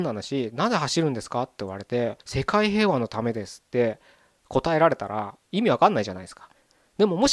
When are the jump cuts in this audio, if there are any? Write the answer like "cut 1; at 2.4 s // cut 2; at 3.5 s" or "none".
cut 1; at 2.2 s // cut 2; at 5.4 s